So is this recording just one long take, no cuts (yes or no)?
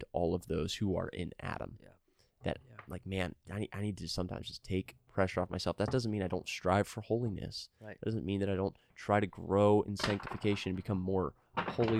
yes